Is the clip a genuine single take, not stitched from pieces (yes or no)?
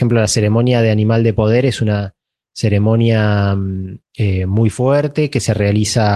no